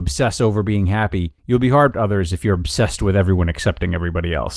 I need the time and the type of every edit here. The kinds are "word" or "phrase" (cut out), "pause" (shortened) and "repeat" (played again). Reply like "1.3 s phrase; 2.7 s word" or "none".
1.4 s pause; 1.9 s phrase

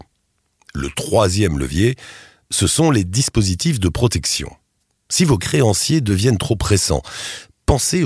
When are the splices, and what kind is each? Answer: none

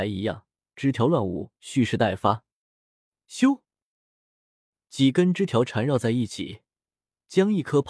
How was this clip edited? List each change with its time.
1.6 s pause

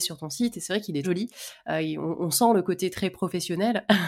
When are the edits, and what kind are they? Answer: 1.0 s word

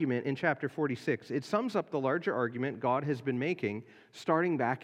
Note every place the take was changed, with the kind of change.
none

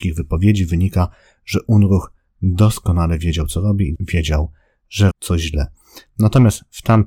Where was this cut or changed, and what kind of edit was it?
4.0 s word; 5.1 s word

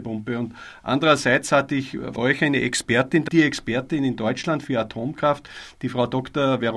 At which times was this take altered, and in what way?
2.2 s word; 3.3 s word

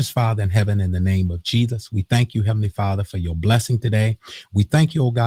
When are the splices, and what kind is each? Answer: none

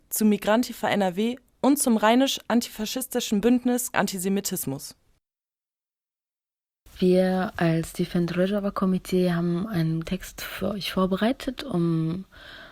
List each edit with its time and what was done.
3.9 s word; 10.0 s word

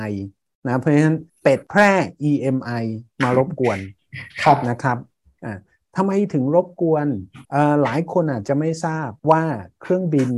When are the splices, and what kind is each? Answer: 1.3 s pause; 7.4 s pause; 9.2 s pause

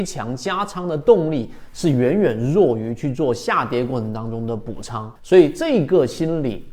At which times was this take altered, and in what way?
5.2 s pause

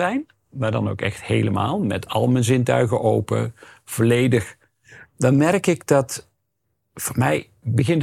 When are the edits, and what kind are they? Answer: none

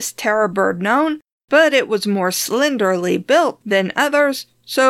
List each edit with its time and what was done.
none

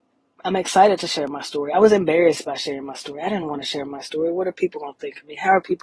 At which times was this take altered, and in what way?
none

